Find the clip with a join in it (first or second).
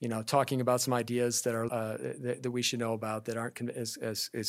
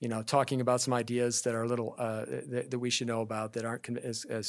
first